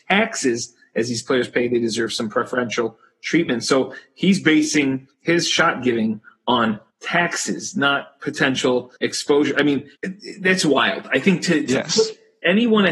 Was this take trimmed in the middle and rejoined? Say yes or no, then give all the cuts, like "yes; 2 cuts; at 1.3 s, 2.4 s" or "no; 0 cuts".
yes; 4 cuts; at 5.1 s, 6.9 s, 9.0 s, 10.0 s